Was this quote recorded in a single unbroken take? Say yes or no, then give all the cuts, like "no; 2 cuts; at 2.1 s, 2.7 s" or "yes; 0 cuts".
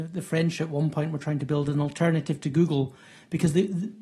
yes; 0 cuts